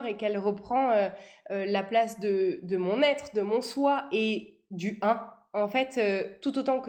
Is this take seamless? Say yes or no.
yes